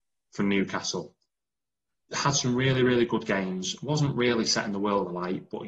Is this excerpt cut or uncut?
uncut